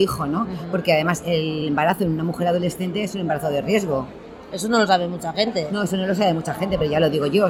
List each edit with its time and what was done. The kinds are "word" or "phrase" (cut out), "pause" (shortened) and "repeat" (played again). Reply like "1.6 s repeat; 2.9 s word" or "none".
none